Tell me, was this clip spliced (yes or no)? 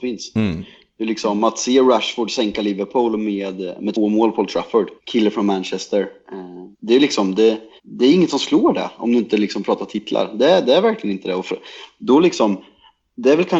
yes